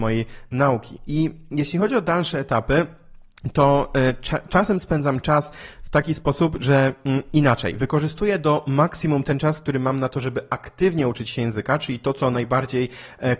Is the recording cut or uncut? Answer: uncut